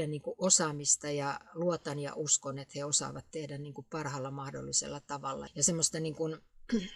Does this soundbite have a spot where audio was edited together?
yes; 1 cut; at 5.5 s

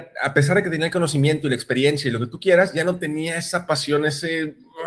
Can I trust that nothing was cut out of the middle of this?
yes; 0 cuts

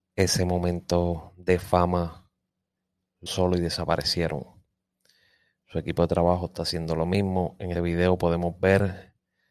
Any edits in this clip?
yes; 2 cuts; at 3.3 s, 7.7 s

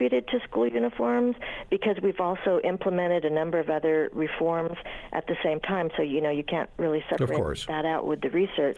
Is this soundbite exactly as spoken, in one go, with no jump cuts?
yes; 0 cuts

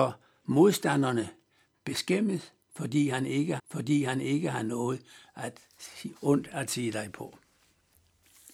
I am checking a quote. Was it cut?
yes; 2 cuts; at 3.6 s, 6.1 s

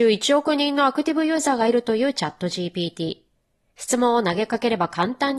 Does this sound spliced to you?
no; 0 cuts

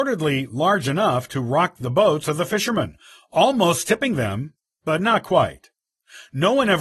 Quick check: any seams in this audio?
no; 0 cuts

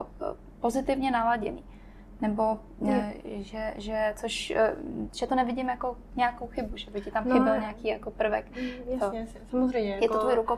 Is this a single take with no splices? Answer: yes; 0 cuts

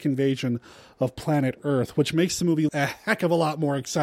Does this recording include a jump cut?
yes; 1 cut; at 2.7 s

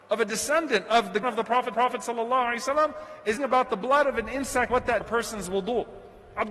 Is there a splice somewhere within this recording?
yes; 5 cuts; at 1.2 s, 1.7 s, 3.4 s, 4.7 s, 5.0 s

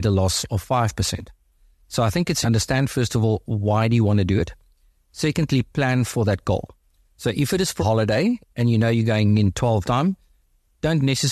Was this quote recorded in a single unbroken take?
no; 3 cuts; at 2.4 s, 7.8 s, 9.8 s

